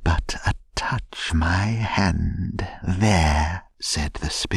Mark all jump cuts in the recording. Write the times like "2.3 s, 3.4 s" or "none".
1.3 s